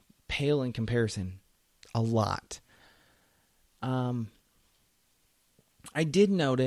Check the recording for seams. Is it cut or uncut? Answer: uncut